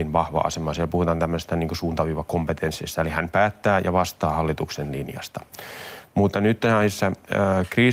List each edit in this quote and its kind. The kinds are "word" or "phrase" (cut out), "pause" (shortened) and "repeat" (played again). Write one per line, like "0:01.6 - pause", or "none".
none